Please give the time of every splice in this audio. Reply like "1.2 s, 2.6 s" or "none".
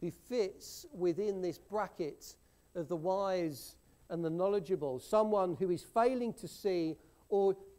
none

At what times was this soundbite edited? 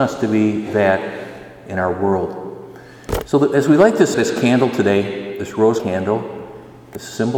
4.1 s, 5.8 s

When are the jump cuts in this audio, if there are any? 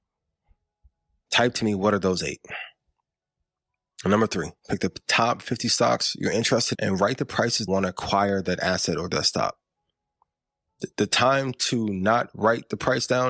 4.6 s, 6.7 s, 7.7 s

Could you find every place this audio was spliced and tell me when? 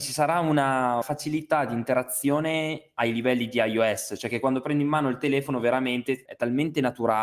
1.0 s, 6.3 s

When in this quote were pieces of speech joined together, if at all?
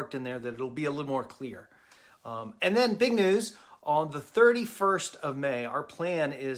none

